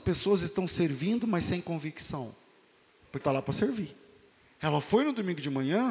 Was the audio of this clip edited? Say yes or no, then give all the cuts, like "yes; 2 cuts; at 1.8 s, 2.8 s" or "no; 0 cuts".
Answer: yes; 2 cuts; at 3.2 s, 4.3 s